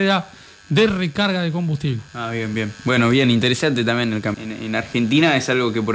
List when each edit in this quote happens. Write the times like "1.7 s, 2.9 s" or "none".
2.1 s, 4.3 s